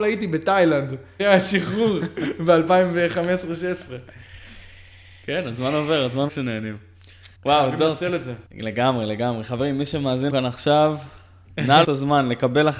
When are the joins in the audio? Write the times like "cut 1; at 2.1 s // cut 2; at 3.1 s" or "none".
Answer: cut 1; at 1.2 s // cut 2; at 6.3 s // cut 3; at 7.3 s // cut 4; at 8.5 s // cut 5; at 10.3 s // cut 6; at 11.8 s